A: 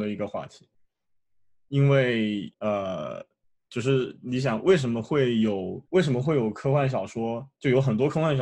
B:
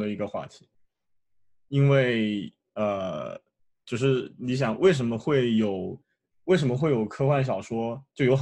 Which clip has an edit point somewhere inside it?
A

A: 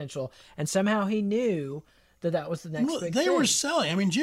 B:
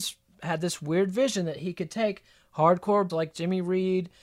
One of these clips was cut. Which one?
B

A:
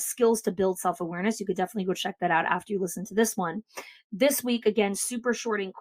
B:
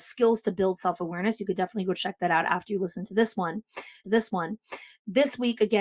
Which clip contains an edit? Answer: B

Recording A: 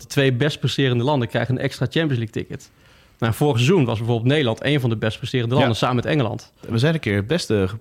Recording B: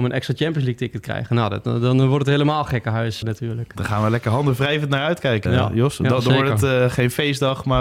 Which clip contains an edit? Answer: B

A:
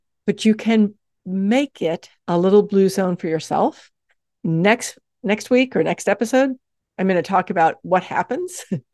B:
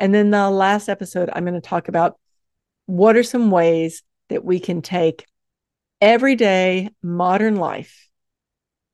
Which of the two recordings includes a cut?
A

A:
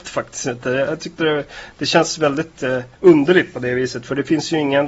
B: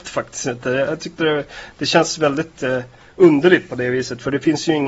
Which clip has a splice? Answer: A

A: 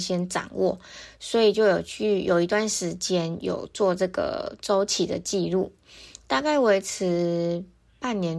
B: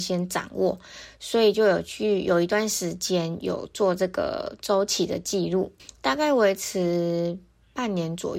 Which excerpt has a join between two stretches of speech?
B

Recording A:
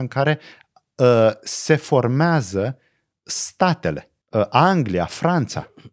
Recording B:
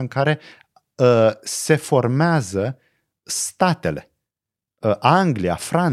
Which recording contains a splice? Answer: A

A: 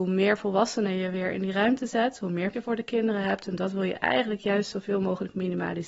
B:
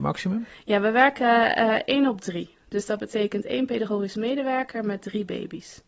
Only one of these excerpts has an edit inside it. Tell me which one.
A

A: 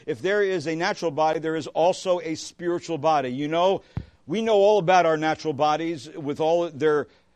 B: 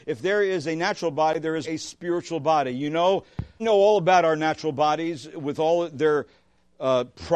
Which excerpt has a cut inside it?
B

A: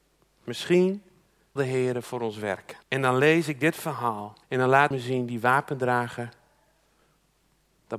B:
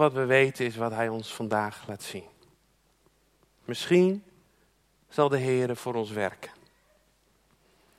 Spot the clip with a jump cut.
A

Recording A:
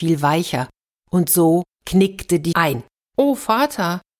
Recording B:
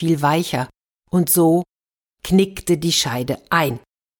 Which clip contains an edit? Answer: A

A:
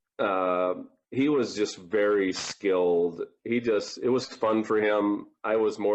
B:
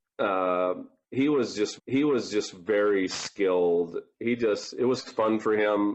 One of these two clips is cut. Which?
B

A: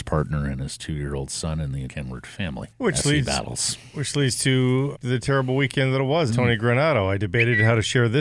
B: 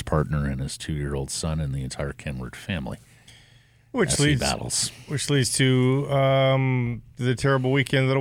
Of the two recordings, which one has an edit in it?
A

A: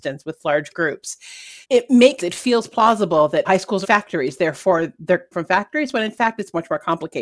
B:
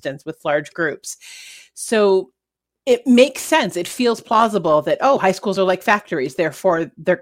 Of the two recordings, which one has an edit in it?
A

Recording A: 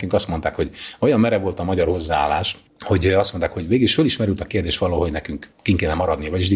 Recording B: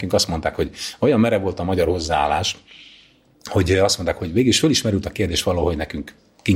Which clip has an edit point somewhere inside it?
A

